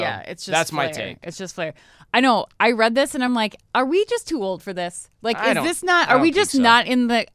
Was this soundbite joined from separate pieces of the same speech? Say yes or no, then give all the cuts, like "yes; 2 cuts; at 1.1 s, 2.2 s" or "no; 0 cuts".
no; 0 cuts